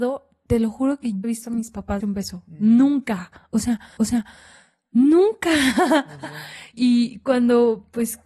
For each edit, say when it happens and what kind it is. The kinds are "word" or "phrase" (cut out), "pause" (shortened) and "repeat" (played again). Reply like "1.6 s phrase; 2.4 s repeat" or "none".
1.2 s phrase; 2.0 s word; 4.0 s repeat; 6.7 s word

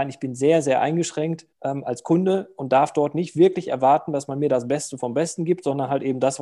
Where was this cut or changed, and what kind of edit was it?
1.5 s pause

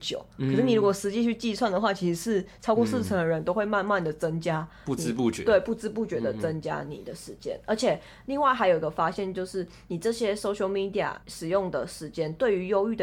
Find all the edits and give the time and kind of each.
11.2 s pause

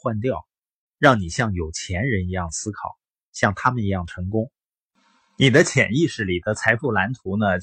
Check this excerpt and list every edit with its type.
none

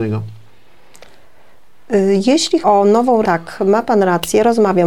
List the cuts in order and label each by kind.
2.6 s word; 3.2 s word

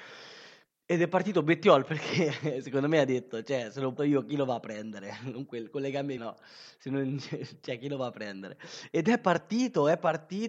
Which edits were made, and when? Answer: 4.0 s word; 6.2 s word

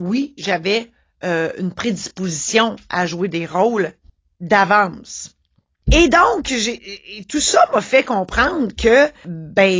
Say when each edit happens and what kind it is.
4.1 s pause

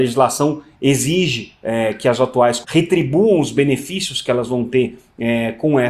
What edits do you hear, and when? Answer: 2.6 s word

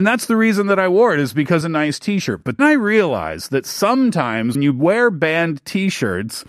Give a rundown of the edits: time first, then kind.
1.6 s phrase; 2.6 s word; 4.5 s word

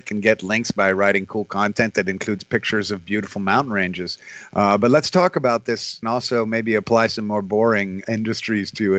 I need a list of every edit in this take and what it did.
6.0 s phrase

